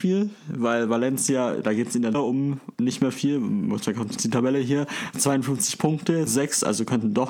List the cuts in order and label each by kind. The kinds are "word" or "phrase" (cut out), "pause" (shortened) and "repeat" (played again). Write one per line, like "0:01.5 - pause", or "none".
0:02.1 - word
0:02.7 - pause
0:04.2 - word
0:06.3 - phrase